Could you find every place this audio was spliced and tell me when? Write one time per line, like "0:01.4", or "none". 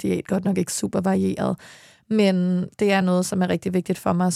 none